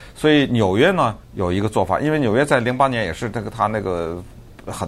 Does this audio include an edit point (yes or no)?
yes